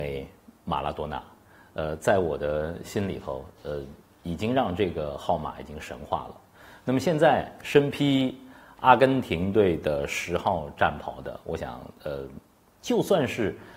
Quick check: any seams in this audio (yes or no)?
no